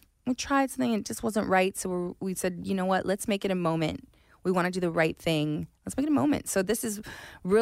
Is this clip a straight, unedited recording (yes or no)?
yes